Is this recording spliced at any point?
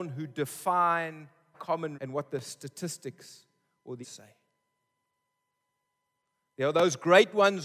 yes; 3 cuts; at 1.5 s, 1.9 s, 4.0 s

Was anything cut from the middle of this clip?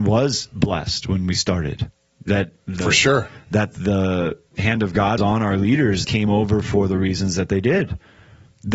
yes; 3 cuts; at 2.8 s, 5.2 s, 6.0 s

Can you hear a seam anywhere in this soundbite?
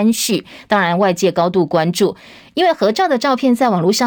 no; 0 cuts

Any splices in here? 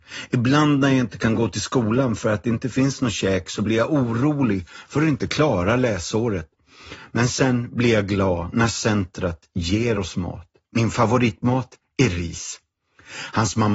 no; 0 cuts

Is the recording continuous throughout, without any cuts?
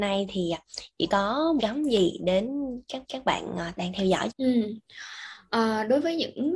no; 4 cuts; at 1.1 s, 1.6 s, 3.0 s, 4.3 s

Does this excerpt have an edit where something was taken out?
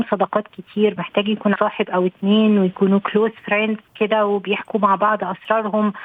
yes; 2 cuts; at 1.0 s, 1.6 s

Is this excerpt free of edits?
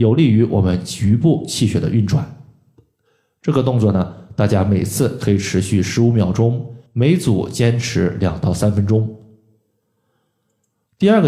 no; 1 cut; at 6.9 s

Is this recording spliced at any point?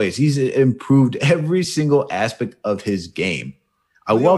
no; 0 cuts

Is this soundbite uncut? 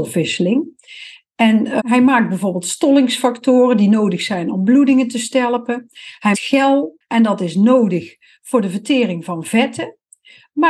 no; 3 cuts; at 1.8 s, 6.3 s, 7.0 s

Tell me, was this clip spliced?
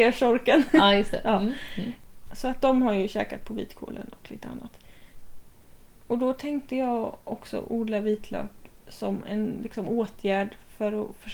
no; 0 cuts

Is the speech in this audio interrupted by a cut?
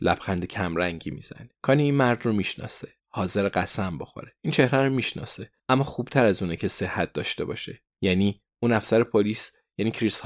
yes; 5 cuts; at 1.5 s, 3.0 s, 4.4 s, 5.6 s, 7.9 s

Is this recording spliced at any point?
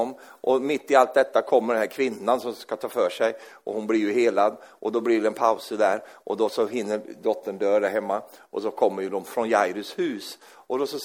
no; 0 cuts

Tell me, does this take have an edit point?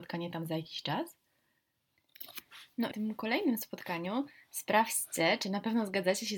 yes; 1 cut; at 2.9 s

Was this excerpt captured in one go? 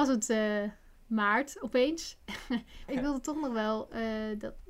no; 1 cut; at 2.9 s

